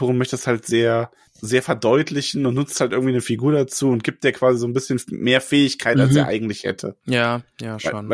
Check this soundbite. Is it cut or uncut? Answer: uncut